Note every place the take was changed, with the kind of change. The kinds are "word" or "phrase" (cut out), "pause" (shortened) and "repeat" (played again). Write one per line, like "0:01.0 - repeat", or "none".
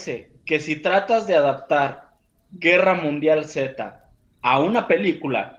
none

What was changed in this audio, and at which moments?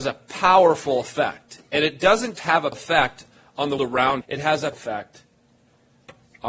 0:02.4 - word
0:02.7 - word
0:03.8 - word
0:04.2 - word
0:04.7 - word

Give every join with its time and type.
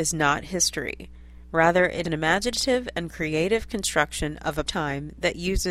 0:02.0 - word
0:04.7 - word

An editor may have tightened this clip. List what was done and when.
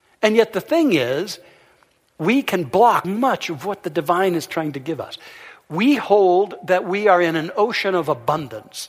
0:03.0 - word

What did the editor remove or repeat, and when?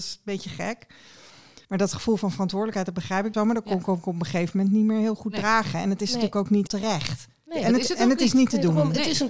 0:01.6 - pause
0:03.3 - word
0:06.7 - word

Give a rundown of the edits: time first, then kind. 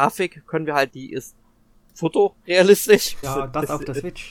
0:00.9 - word
0:03.2 - word

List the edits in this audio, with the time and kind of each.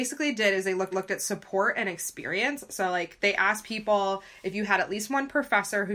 0:00.9 - repeat

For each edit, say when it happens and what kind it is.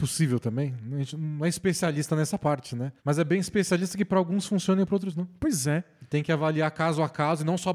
0:03.0 - pause

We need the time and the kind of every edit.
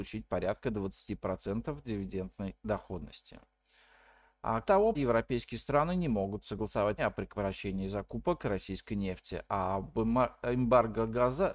0:04.6 - word
0:04.9 - word
0:07.0 - word

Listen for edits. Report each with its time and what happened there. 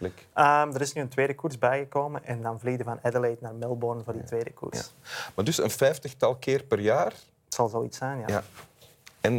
none

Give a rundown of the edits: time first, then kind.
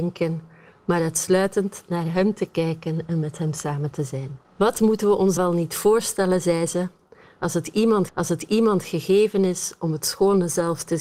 0:04.4 - pause
0:05.4 - word
0:08.1 - repeat

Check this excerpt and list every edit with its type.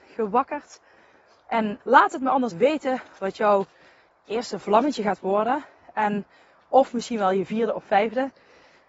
0:01.8 - word
0:02.5 - word

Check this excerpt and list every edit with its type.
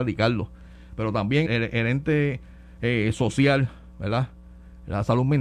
0:01.5 - word

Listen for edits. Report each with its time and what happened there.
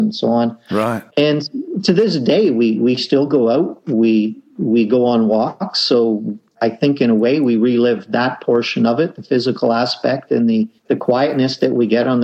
0:01.1 - pause
0:10.8 - pause

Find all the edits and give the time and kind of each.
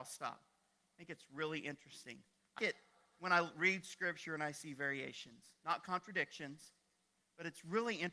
0:02.6 - word

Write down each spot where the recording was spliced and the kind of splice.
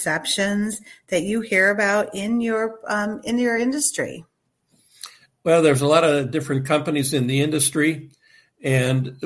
none

